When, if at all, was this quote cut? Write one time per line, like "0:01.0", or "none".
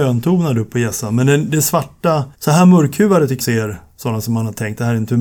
0:02.3
0:03.4